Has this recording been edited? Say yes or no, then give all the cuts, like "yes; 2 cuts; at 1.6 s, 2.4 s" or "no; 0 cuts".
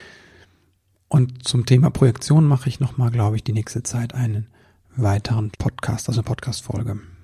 yes; 1 cut; at 5.5 s